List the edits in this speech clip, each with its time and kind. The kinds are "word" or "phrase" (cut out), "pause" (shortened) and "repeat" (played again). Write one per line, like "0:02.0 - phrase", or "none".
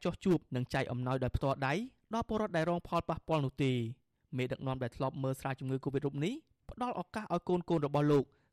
none